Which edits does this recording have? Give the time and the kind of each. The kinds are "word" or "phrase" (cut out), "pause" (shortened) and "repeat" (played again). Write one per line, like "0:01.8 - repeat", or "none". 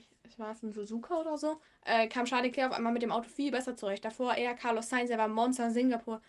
0:01.6 - pause